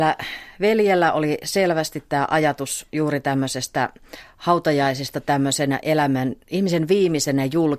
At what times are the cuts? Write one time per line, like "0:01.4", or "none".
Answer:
0:05.8